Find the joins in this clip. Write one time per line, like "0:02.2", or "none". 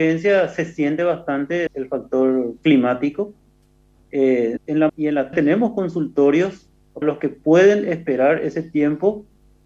0:01.7
0:04.6
0:04.9
0:05.3
0:07.0